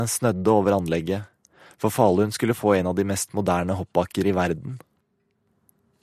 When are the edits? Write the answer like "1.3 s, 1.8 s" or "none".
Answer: none

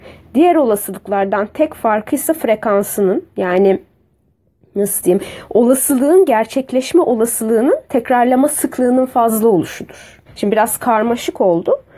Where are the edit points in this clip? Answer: 10.3 s

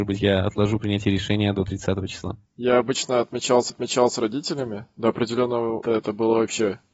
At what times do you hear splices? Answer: 2.4 s, 3.7 s, 5.8 s

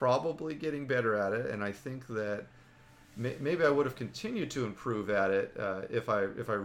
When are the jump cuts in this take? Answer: none

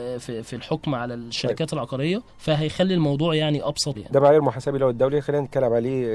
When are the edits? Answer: 2.3 s, 3.9 s

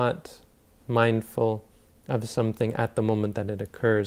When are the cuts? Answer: none

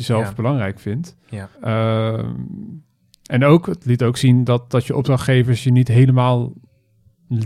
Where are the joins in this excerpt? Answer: 1.5 s

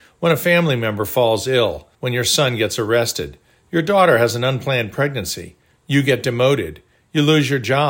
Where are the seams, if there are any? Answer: 1.9 s

